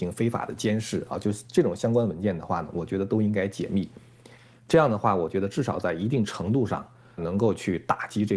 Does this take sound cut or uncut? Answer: cut